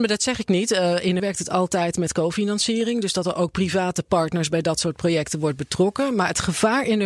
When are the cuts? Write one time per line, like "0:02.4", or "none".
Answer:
0:01.2